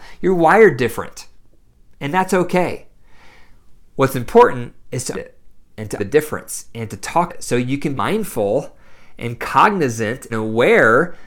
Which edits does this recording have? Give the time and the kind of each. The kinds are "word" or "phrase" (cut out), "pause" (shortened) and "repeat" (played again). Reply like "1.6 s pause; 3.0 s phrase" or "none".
5.1 s word; 6.0 s word; 7.3 s word; 7.9 s word; 10.3 s word